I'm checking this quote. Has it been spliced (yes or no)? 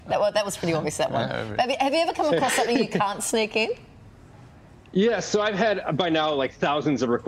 no